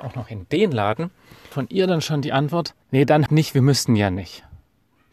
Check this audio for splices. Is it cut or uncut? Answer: cut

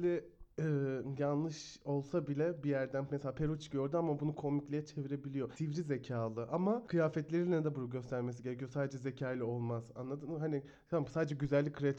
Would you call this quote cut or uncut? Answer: uncut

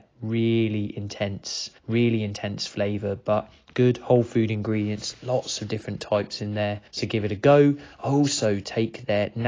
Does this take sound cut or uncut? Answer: cut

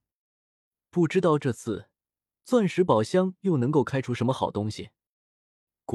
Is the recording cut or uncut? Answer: uncut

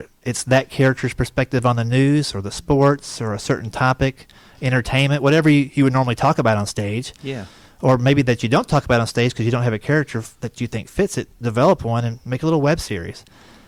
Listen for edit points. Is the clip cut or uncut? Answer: uncut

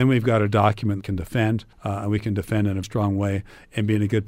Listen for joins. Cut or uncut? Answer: cut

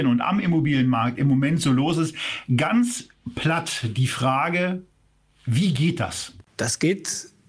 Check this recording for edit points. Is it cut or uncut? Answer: uncut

